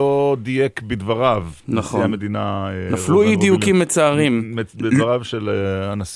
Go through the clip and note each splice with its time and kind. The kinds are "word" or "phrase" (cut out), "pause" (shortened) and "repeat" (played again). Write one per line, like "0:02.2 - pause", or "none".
0:01.6 - pause